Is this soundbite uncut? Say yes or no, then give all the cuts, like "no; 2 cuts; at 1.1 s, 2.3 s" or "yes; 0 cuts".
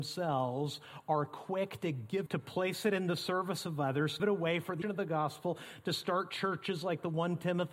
no; 3 cuts; at 2.3 s, 4.2 s, 4.8 s